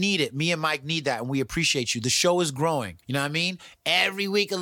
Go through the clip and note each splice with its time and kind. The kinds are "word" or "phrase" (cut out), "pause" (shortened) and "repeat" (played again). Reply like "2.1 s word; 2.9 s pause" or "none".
3.0 s pause